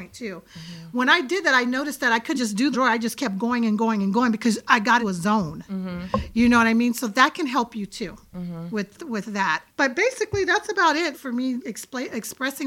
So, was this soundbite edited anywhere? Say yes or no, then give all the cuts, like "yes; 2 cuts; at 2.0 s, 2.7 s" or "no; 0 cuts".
yes; 7 cuts; at 2.3 s, 2.7 s, 5.0 s, 9.0 s, 9.7 s, 11.1 s, 11.6 s